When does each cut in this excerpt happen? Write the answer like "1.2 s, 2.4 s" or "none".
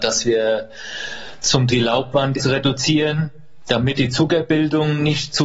1.7 s, 2.4 s, 4.0 s